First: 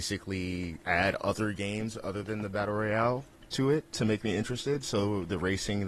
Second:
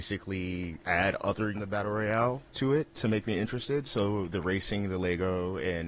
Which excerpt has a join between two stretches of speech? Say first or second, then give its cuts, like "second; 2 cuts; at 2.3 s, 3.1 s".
second; 2 cuts; at 1.5 s, 2.5 s